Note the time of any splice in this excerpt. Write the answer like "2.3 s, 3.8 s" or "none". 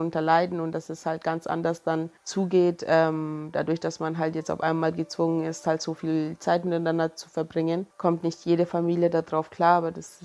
2.2 s, 7.9 s